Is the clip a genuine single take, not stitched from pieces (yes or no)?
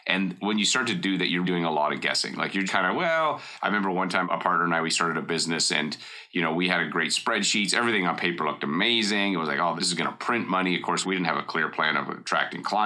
no